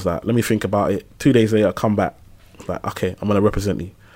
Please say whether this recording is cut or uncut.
uncut